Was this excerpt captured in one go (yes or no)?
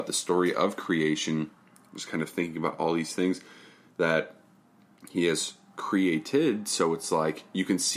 yes